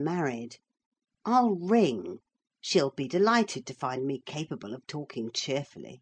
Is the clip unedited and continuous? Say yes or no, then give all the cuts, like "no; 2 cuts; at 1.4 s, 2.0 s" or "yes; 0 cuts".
yes; 0 cuts